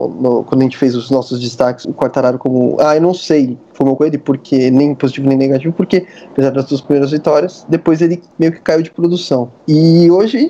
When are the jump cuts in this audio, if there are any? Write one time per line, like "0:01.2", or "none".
0:01.8
0:04.0